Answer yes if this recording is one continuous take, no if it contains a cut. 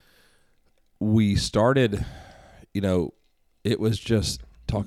yes